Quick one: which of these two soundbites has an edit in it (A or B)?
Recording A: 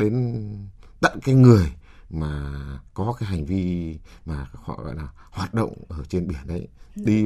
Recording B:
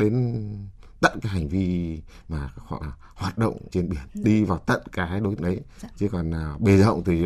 B